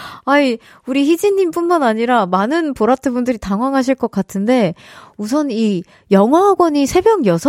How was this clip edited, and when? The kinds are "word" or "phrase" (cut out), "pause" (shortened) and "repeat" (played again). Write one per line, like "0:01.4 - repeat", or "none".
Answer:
none